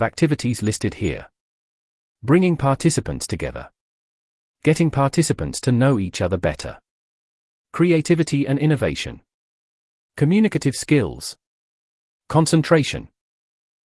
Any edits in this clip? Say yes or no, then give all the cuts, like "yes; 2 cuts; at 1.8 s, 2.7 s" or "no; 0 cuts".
no; 0 cuts